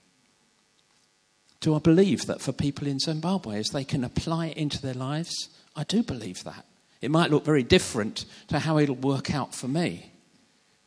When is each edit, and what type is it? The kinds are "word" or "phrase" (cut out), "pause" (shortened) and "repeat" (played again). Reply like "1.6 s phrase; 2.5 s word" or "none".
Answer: 3.7 s phrase